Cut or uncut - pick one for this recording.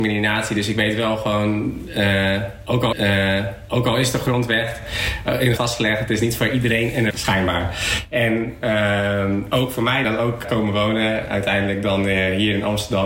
cut